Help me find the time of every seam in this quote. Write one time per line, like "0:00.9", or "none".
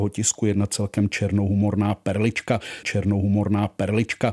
0:02.8